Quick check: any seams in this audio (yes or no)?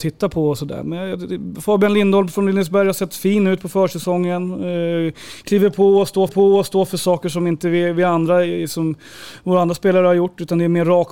yes